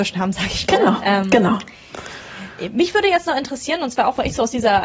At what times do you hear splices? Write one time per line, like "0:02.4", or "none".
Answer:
none

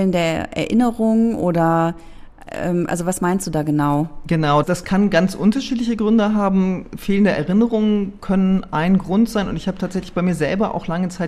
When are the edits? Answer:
0:04.6

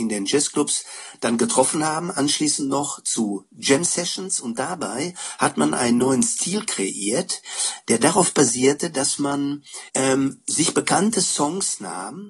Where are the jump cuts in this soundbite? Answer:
0:09.9

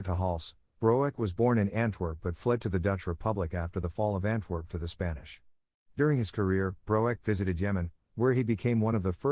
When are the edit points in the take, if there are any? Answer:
none

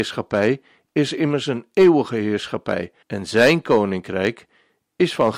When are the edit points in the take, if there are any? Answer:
0:03.0

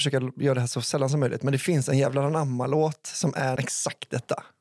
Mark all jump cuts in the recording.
0:03.6

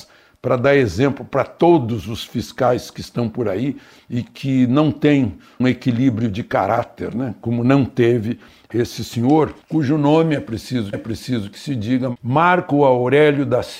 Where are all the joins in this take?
0:05.6
0:09.6
0:10.9

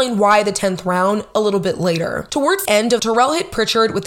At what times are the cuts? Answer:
0:01.3
0:02.7
0:03.0

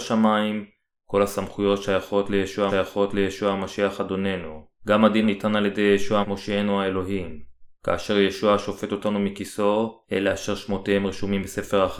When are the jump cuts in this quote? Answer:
0:02.7
0:04.8
0:05.2
0:06.2
0:07.7
0:10.0

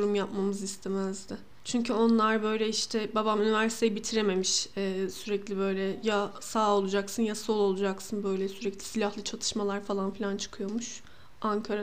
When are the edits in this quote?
none

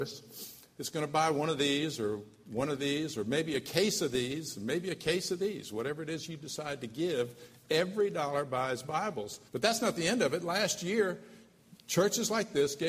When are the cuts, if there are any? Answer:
0:09.5

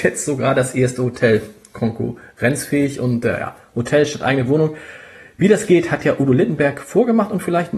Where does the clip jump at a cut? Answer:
none

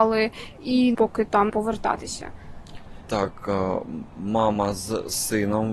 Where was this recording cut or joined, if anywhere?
0:00.9
0:01.5

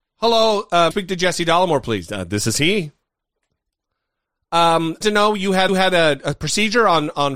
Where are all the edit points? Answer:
0:00.9
0:05.0
0:05.7

